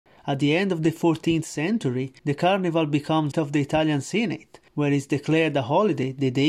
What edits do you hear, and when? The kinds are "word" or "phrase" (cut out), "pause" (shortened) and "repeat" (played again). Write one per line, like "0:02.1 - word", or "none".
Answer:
0:02.2 - pause
0:03.3 - phrase
0:04.7 - pause